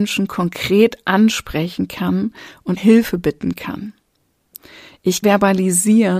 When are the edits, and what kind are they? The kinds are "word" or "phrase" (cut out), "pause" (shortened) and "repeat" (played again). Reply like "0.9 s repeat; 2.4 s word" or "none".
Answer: 2.8 s word; 5.2 s word